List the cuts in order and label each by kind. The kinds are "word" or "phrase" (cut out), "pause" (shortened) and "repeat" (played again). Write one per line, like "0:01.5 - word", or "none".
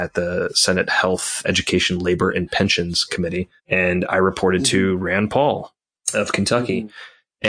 0:01.4 - word
0:03.6 - pause
0:05.9 - pause